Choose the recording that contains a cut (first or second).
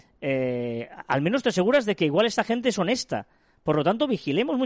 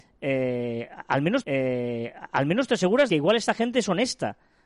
second